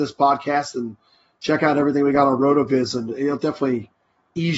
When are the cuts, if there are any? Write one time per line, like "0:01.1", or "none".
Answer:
none